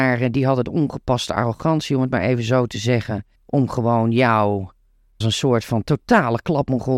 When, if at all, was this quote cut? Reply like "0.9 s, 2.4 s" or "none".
3.4 s, 5.2 s